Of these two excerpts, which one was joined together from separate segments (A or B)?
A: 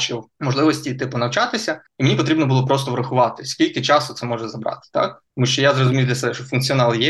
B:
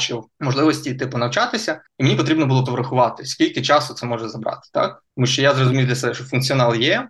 B